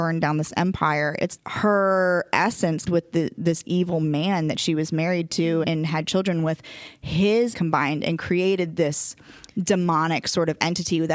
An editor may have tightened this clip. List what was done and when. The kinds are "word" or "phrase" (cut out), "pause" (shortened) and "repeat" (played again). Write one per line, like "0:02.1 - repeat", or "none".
0:01.4 - word
0:02.9 - word
0:05.6 - word
0:07.5 - word